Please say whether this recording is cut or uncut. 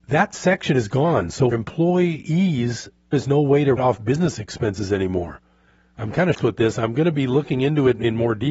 cut